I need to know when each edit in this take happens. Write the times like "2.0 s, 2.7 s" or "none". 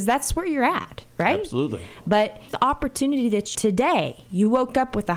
2.5 s, 3.5 s

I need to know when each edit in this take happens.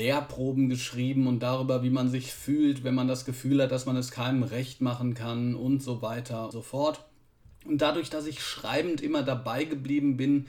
6.5 s

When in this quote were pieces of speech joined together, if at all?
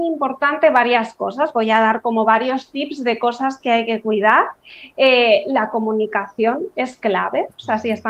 none

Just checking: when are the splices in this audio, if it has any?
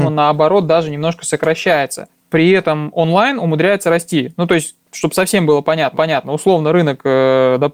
5.9 s

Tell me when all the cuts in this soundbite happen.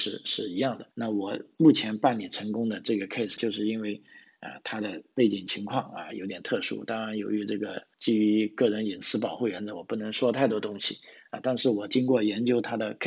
0.9 s, 3.4 s, 7.9 s

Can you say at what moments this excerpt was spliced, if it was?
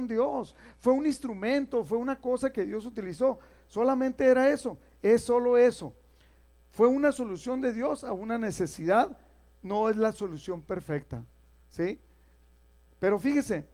none

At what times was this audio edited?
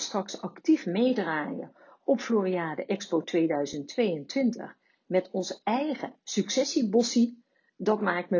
none

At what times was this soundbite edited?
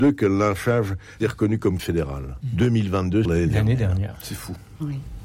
1.2 s, 1.8 s, 3.3 s

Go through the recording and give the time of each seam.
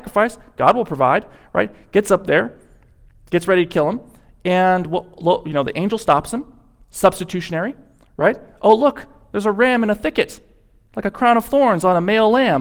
none

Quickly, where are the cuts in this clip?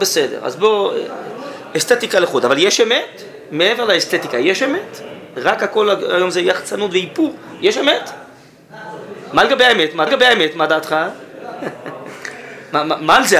10.1 s

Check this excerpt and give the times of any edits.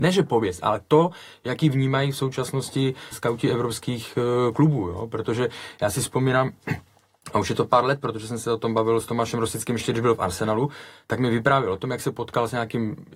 3.1 s

